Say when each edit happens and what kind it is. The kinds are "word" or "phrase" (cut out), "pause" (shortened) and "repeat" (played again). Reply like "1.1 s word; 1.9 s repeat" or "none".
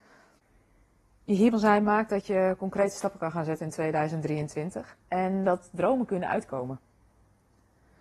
1.5 s word; 5.0 s pause